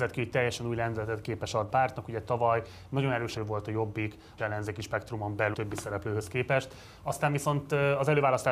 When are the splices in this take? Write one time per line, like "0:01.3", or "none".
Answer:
0:01.7
0:03.4
0:04.4
0:05.5